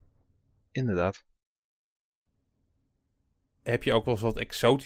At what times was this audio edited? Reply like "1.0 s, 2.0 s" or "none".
none